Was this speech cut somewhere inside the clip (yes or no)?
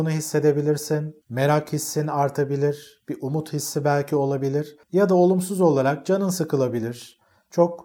yes